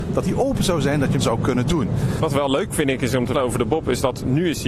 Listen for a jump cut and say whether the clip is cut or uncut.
cut